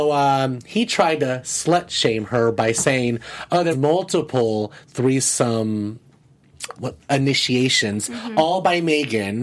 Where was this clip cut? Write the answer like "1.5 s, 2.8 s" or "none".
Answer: 3.7 s, 6.7 s